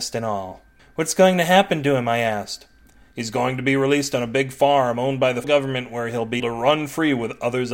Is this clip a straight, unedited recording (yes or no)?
no